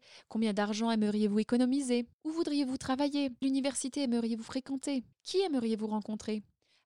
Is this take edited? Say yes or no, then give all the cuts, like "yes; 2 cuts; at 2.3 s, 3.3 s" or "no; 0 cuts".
yes; 3 cuts; at 2.1 s, 3.4 s, 5.1 s